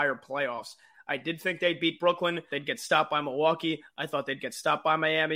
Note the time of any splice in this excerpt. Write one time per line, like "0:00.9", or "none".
0:02.5